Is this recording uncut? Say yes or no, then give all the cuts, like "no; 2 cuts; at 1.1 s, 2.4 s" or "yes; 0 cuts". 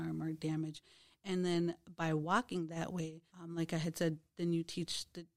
no; 1 cut; at 3.3 s